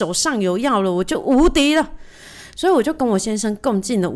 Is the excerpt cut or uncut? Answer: uncut